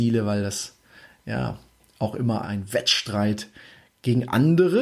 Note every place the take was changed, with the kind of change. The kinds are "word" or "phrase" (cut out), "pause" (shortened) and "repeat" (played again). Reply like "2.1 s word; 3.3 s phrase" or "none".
2.4 s word